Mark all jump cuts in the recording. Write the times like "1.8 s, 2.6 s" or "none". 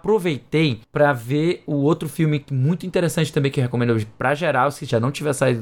none